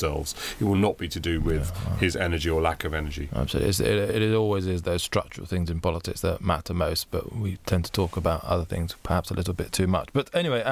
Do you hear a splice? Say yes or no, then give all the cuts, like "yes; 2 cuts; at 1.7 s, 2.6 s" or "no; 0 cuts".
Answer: no; 0 cuts